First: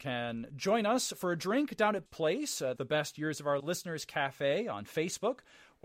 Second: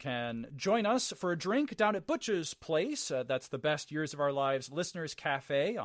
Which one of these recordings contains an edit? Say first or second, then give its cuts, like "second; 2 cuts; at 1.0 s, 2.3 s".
first; 3 cuts; at 2.1 s, 2.8 s, 3.6 s